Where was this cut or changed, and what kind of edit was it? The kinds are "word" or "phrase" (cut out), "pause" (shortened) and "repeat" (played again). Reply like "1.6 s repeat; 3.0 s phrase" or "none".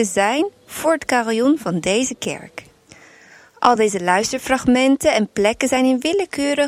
none

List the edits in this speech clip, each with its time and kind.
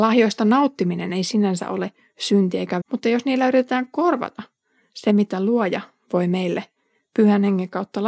2.8 s word

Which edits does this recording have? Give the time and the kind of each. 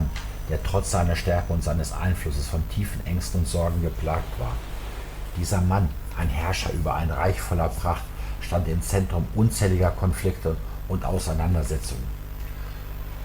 none

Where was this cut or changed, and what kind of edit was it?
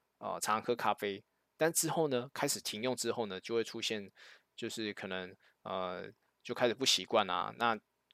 none

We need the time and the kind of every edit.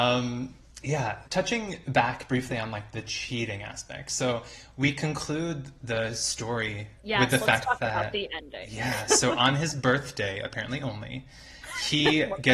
1.3 s pause; 7.0 s pause

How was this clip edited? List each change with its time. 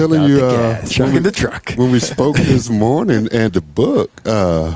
0.9 s word; 3.5 s word

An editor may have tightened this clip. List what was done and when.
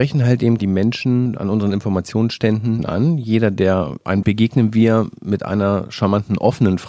4.2 s phrase

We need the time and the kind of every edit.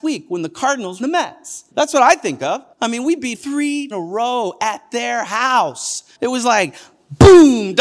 1.0 s phrase; 1.7 s pause; 2.7 s pause; 3.3 s word; 3.9 s phrase; 6.1 s pause

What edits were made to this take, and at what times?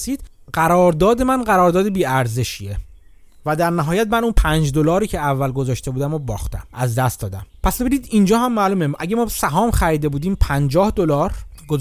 6.7 s pause

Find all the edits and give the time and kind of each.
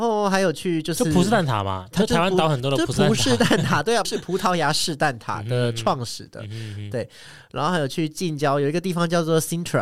1.9 s word; 4.0 s word

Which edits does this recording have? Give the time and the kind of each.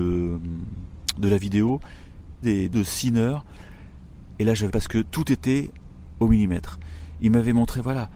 2.4 s phrase; 2.7 s word; 4.7 s word

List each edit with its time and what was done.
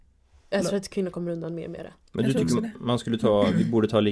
none

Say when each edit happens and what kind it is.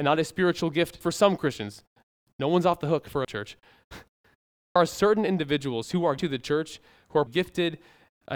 1.0 s word; 3.2 s word; 4.8 s word; 6.2 s word; 7.3 s word

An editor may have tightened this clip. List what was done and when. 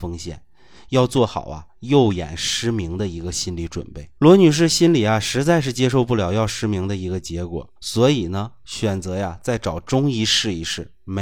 4.2 s pause; 7.8 s pause

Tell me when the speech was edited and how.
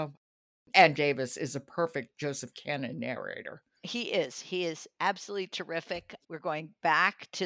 1.0 s word; 6.2 s pause

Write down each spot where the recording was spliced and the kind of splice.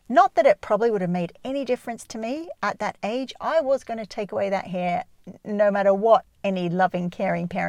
6.3 s pause

